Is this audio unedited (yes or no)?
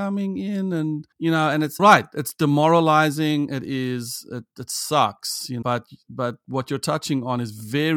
no